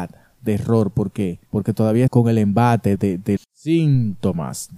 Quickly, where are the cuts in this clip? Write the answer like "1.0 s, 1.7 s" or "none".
1.5 s, 2.1 s, 3.0 s, 3.4 s